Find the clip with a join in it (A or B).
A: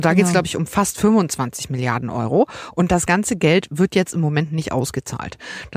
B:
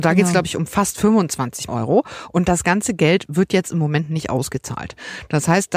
B